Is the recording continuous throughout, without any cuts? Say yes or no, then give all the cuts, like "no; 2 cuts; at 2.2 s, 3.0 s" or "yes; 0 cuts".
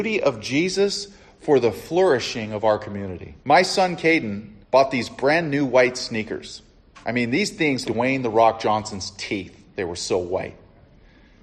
no; 4 cuts; at 3.4 s, 4.6 s, 7.0 s, 7.8 s